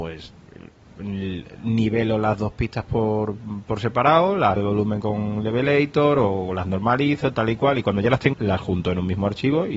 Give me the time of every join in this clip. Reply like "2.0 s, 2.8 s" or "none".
4.6 s, 8.3 s

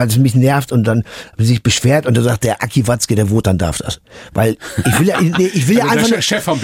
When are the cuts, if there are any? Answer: none

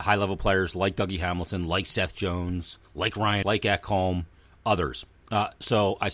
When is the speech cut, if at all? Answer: 2.8 s, 3.4 s

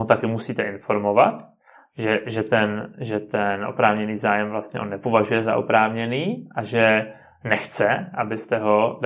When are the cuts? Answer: none

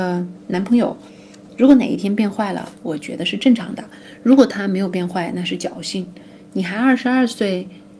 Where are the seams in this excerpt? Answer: 1.5 s

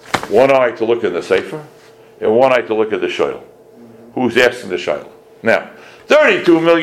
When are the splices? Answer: none

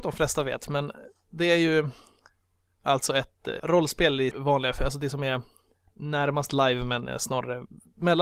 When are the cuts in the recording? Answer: 3.6 s, 4.3 s

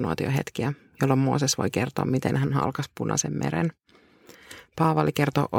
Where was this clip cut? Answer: none

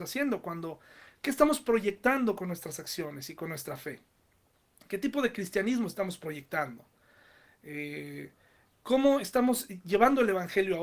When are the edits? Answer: none

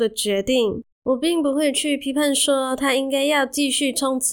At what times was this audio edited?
0.9 s

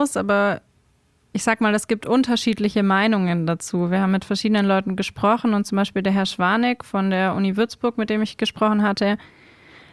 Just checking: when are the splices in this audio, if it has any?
none

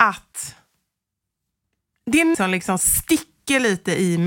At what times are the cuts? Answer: 2.3 s

